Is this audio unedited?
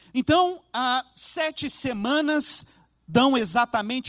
yes; 0 cuts

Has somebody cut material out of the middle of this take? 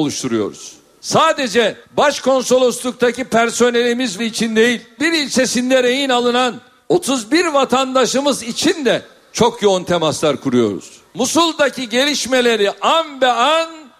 yes; 4 cuts; at 1.8 s, 4.2 s, 5.0 s, 6.8 s

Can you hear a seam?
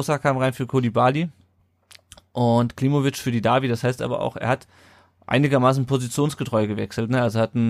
no; 0 cuts

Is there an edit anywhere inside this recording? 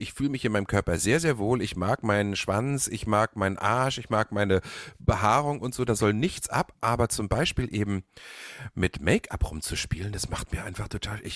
no; 0 cuts

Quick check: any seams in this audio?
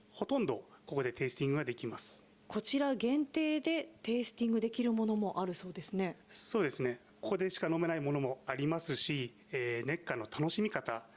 yes; 2 cuts; at 2.3 s, 6.2 s

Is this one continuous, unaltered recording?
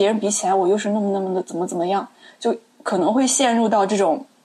yes; 0 cuts

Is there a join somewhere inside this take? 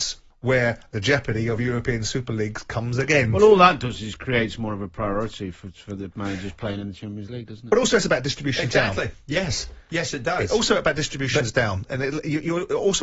no; 0 cuts

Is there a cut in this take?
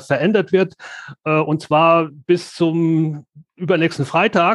no; 0 cuts

